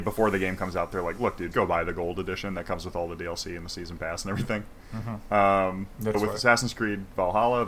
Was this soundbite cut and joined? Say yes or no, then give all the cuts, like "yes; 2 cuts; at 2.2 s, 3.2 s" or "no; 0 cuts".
yes; 2 cuts; at 1.5 s, 6.1 s